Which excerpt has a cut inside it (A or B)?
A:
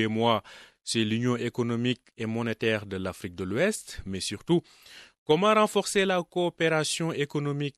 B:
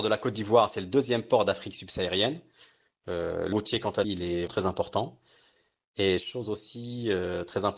B